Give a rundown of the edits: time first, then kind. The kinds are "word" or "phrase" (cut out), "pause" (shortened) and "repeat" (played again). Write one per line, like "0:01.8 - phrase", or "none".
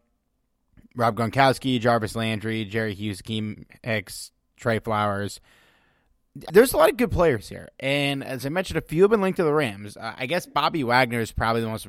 0:06.5 - word

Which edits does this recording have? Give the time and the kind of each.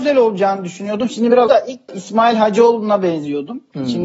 0:01.5 - word
0:01.9 - word

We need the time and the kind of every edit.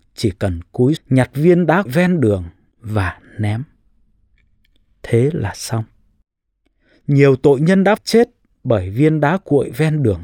0:01.0 - word
0:01.9 - word
0:08.0 - word

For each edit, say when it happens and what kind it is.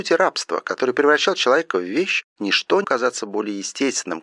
0:02.3 - pause
0:02.8 - word

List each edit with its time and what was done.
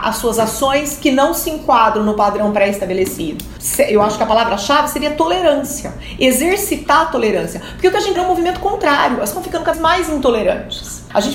0:08.2 - word
0:09.3 - word
0:09.7 - word

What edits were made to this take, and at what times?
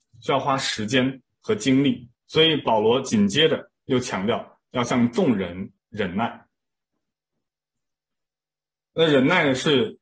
0:02.1 - pause
0:03.8 - pause
0:05.8 - pause

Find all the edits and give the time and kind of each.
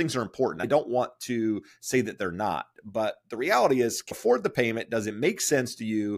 0:04.1 - word

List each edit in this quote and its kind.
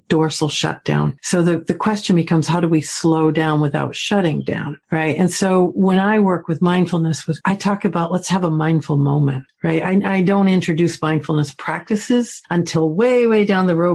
0:07.4 - word

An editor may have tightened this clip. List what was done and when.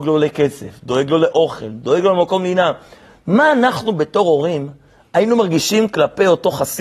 none

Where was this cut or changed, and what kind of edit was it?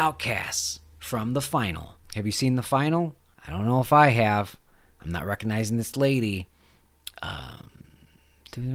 0:02.0 - pause
0:03.3 - pause

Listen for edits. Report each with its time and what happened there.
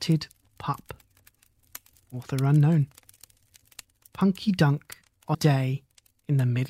0:01.9 - pause
0:03.8 - pause
0:05.3 - word

